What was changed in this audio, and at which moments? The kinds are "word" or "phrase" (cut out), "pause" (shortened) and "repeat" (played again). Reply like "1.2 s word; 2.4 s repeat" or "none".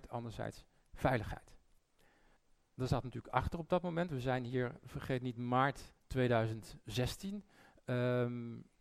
2.4 s pause; 6.0 s pause